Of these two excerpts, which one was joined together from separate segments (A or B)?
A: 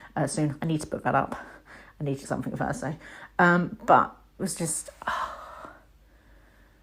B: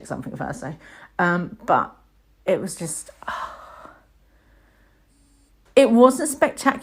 A